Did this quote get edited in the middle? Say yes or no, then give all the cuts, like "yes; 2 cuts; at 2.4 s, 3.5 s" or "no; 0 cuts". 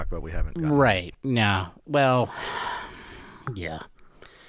no; 0 cuts